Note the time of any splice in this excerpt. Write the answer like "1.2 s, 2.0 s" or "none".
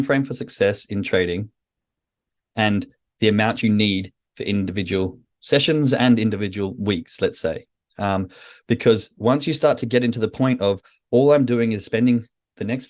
none